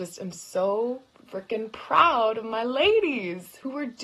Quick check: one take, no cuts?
yes; 0 cuts

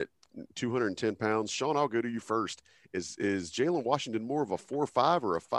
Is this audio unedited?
yes; 0 cuts

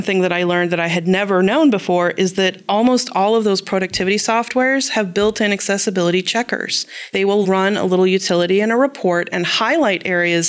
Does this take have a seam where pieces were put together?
yes; 1 cut; at 7.4 s

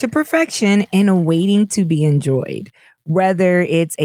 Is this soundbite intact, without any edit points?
yes; 0 cuts

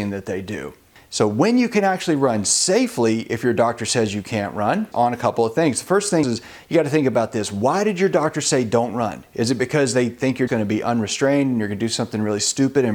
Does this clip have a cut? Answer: yes; 3 cuts; at 4.9 s, 6.2 s, 10.5 s

